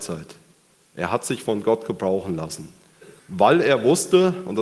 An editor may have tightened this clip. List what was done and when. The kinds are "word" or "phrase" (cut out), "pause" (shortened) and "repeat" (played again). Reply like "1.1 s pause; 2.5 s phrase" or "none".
3.2 s pause